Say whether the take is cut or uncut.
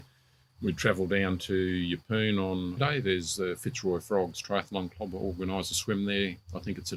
cut